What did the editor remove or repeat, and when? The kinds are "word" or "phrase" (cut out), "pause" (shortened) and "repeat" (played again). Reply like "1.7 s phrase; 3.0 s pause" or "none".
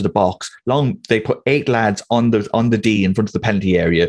none